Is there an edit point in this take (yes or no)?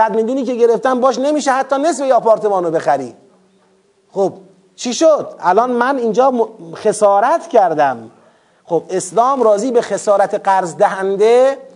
no